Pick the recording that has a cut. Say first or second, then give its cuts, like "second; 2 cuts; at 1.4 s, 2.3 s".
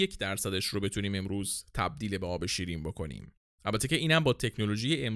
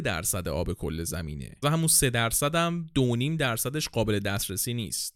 second; 1 cut; at 1.6 s